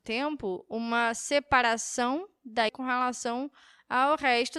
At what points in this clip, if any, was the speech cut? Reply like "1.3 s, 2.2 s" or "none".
2.7 s

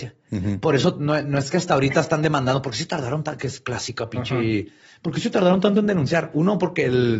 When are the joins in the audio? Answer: none

